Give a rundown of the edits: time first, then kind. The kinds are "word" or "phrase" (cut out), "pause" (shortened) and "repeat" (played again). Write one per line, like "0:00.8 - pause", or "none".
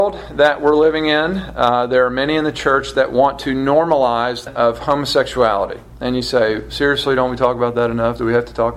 0:04.5 - phrase